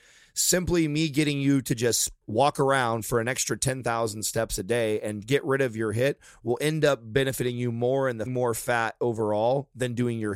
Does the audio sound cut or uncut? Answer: cut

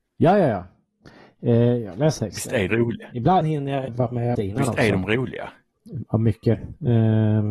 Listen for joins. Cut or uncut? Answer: cut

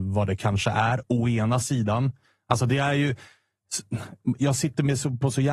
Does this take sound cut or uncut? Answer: uncut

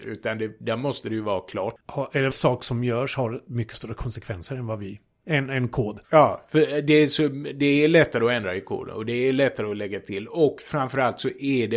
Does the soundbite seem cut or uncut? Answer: cut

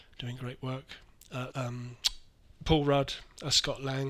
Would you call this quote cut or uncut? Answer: cut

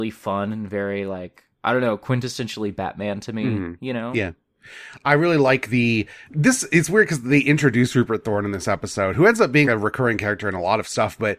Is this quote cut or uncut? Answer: cut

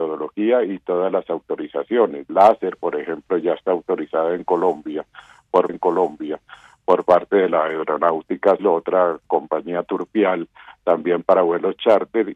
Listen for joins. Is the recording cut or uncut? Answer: cut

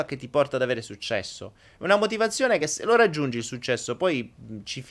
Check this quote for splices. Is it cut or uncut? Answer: uncut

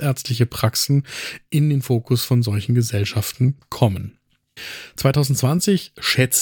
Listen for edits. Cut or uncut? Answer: uncut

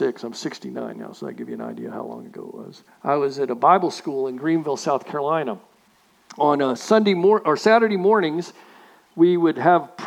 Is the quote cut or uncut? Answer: cut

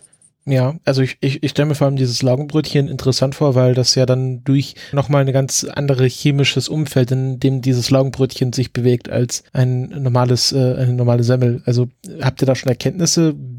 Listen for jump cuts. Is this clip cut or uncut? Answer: cut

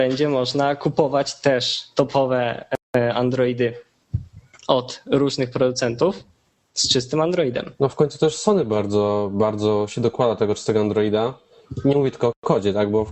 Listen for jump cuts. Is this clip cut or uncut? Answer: cut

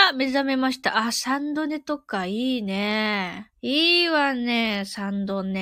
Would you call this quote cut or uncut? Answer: cut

